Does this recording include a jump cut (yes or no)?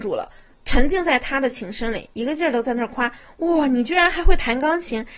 no